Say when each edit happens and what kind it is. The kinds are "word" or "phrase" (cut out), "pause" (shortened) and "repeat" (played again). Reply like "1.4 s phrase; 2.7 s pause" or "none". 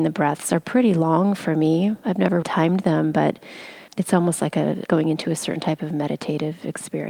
2.4 s word; 3.9 s word; 4.9 s word